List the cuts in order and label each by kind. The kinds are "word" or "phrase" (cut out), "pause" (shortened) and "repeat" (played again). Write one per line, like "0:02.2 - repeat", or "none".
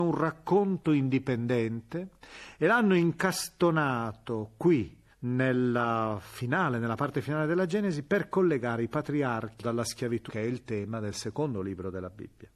0:05.1 - pause
0:09.6 - word
0:10.3 - word